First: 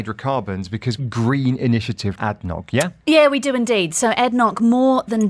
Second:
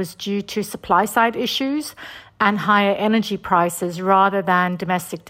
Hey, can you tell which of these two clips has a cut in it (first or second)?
first